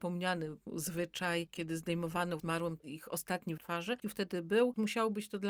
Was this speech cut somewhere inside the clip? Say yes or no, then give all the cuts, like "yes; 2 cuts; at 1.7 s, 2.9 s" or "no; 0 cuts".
yes; 3 cuts; at 2.4 s, 3.6 s, 4.0 s